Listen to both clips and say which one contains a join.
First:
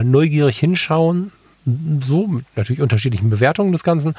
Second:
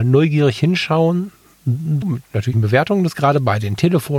second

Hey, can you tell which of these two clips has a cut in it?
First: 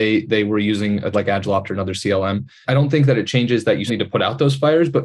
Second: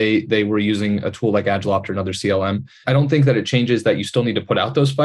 first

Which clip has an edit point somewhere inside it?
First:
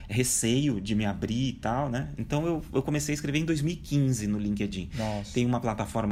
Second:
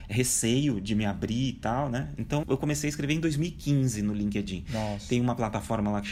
second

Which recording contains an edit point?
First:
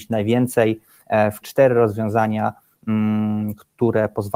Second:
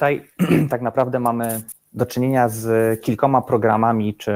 first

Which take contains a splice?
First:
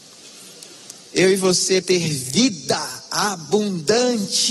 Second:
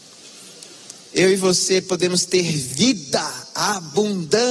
first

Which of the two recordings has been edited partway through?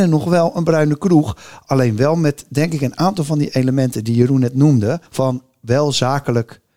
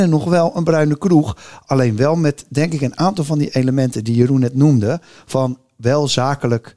first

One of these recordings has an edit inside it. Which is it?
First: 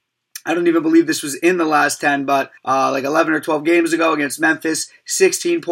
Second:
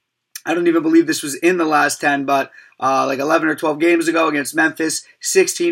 first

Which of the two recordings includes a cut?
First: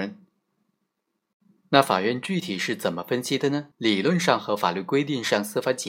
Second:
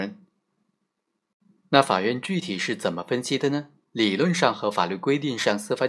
first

